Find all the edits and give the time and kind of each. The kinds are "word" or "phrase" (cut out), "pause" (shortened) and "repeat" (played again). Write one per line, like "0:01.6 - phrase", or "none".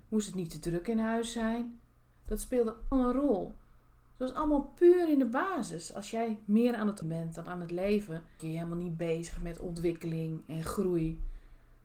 0:02.9 - word
0:07.0 - word
0:08.4 - phrase